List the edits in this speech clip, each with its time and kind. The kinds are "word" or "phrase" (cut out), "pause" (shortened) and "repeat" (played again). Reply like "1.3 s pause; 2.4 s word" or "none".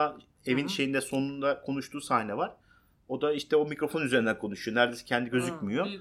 none